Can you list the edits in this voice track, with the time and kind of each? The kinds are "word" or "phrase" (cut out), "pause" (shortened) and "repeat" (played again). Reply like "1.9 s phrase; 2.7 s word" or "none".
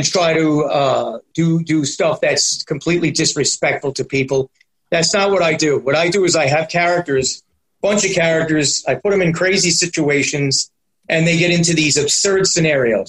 1.3 s word